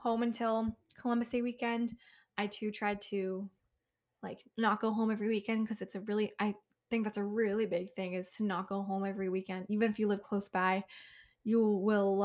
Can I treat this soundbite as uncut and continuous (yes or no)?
yes